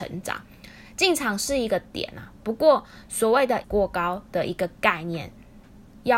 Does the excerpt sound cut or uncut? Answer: cut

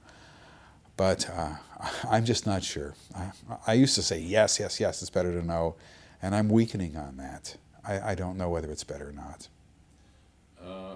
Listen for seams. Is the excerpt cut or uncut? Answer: uncut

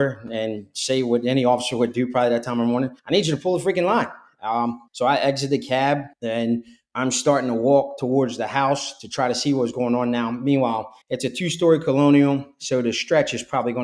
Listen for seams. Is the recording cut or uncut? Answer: cut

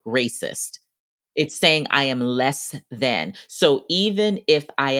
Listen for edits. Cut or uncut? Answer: uncut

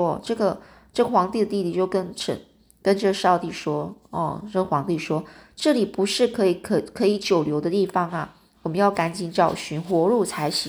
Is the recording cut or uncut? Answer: uncut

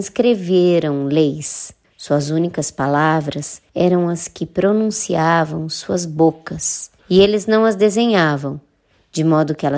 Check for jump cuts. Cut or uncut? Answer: cut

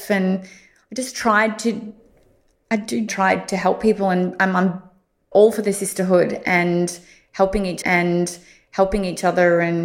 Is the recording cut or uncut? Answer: cut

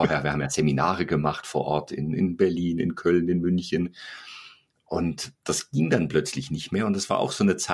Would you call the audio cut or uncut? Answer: uncut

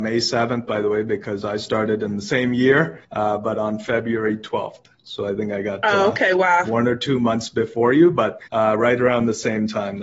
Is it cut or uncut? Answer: cut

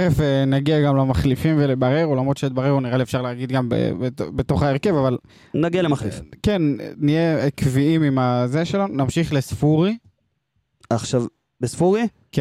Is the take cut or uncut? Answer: uncut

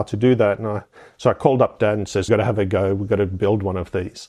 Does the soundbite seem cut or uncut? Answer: cut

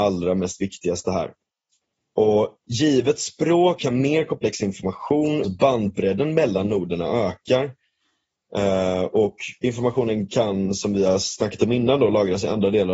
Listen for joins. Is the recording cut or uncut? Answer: cut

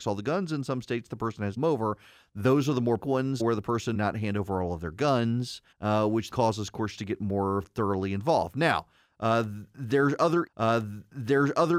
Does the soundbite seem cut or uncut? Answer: cut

